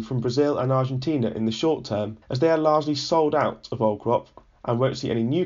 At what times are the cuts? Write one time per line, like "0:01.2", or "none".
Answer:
0:02.2